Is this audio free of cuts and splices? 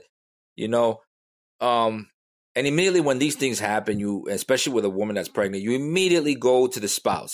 yes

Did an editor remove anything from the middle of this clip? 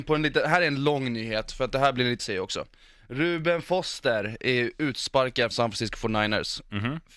yes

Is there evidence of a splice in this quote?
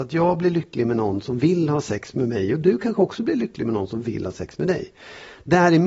no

